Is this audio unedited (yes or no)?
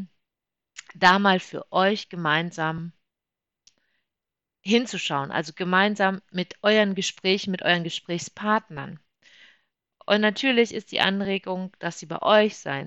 yes